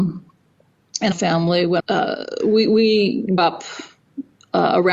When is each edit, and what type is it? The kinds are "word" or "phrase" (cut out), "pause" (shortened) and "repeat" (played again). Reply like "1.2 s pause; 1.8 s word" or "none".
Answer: 1.1 s word; 1.8 s word; 3.4 s word

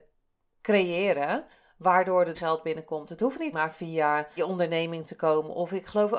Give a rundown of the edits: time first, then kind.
2.3 s word; 3.5 s word; 4.4 s word

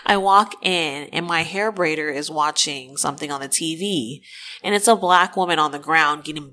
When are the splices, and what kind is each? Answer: none

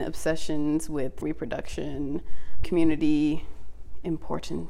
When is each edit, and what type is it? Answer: 1.2 s word; 2.6 s word

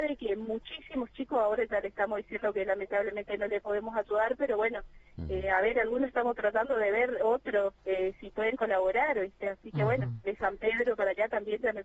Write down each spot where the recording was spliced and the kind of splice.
7.8 s pause

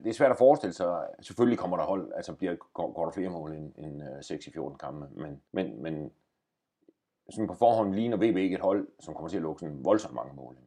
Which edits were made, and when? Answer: 5.5 s pause

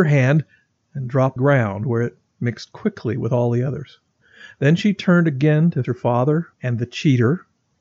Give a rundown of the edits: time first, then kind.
1.4 s phrase; 5.8 s word; 6.5 s pause

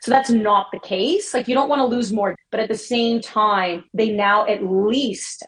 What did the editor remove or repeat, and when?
2.3 s word; 3.9 s pause

